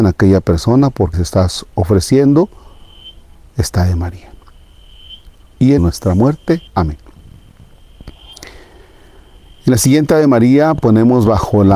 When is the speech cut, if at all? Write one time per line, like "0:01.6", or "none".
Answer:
0:01.1
0:03.4
0:05.8
0:06.7